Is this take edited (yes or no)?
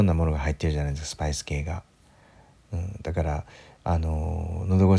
no